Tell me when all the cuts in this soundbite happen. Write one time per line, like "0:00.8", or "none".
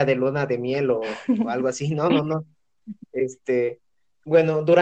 none

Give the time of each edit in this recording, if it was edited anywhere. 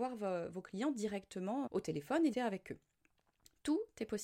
0:01.7
0:02.3

